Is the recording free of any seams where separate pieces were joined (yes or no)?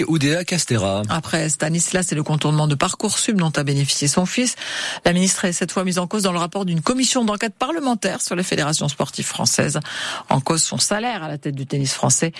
yes